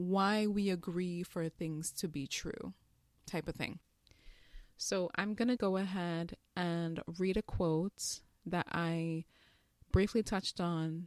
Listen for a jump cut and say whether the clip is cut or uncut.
cut